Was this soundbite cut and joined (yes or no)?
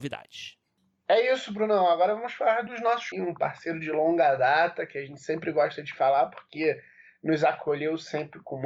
yes